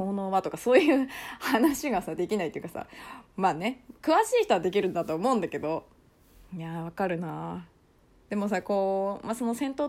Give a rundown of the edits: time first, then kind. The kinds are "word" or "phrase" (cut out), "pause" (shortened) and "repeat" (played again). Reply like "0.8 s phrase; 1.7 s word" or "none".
none